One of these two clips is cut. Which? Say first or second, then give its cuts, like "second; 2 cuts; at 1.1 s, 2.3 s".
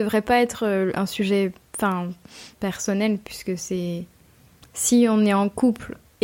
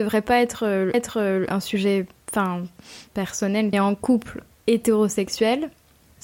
second; 2 cuts; at 0.9 s, 3.7 s